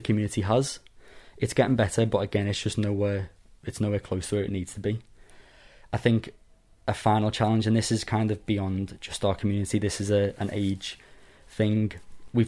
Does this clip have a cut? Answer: no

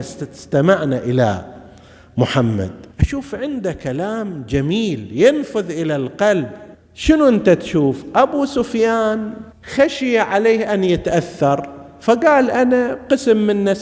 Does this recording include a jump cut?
yes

